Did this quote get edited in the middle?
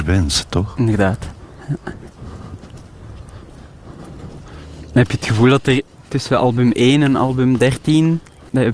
no; 0 cuts

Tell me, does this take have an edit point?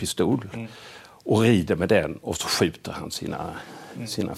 no; 0 cuts

